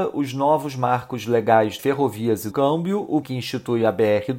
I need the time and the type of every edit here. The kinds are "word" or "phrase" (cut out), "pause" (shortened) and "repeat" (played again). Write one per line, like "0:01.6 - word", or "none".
0:01.8 - word
0:02.5 - word
0:03.2 - word